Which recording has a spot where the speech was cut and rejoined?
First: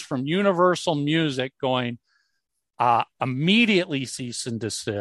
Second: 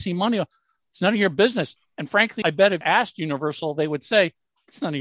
second; 2 cuts; at 2.4 s, 2.8 s

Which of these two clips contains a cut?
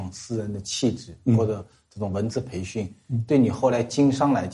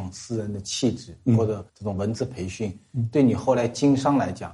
second; 1 cut; at 1.7 s

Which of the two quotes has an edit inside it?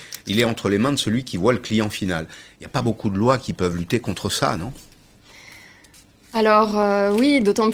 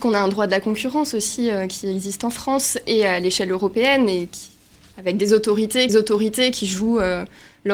second; 1 cut; at 5.9 s

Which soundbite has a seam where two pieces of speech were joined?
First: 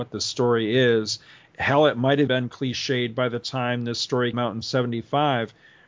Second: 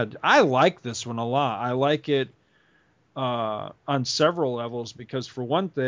first; 2 cuts; at 2.3 s, 4.3 s

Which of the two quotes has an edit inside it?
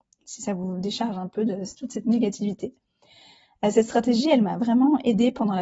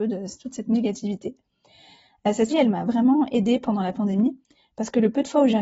second; 1 cut; at 2.5 s

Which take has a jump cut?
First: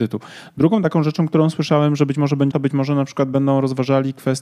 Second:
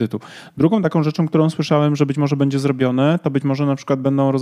first; 1 cut; at 2.5 s

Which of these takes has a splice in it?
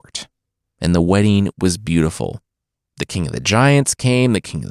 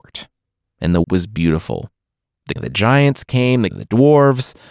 second; 3 cuts; at 1.0 s, 2.6 s, 3.7 s

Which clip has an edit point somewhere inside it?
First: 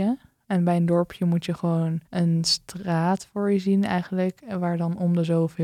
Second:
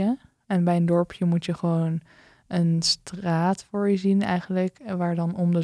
first; 1 cut; at 2.0 s

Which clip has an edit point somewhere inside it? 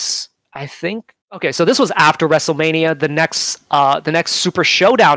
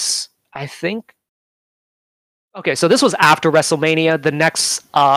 first; 1 cut; at 1.2 s

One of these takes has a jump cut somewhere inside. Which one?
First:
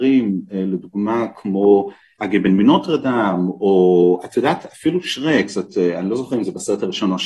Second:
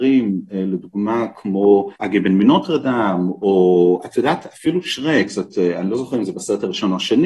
second; 1 cut; at 2.0 s

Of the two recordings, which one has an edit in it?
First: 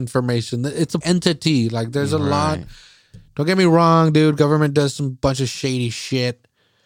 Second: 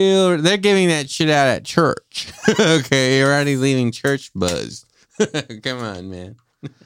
first; 1 cut; at 1.0 s

